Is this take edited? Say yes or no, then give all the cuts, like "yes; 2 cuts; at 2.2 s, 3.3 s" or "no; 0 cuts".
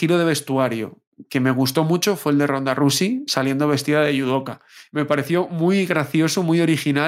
no; 0 cuts